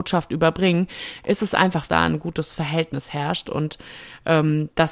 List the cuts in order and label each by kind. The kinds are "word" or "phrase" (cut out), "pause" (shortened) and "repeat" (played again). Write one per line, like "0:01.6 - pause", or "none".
0:01.9 - phrase